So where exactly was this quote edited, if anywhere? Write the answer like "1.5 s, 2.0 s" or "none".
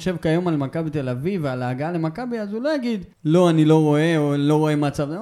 3.1 s